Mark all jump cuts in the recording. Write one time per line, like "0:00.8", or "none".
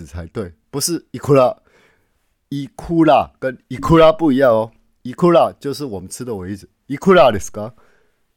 none